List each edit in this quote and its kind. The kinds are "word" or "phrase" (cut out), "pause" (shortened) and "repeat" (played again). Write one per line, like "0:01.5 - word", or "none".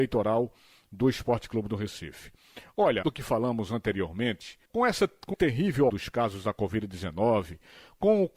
0:03.0 - phrase
0:04.6 - pause
0:05.3 - word
0:05.9 - word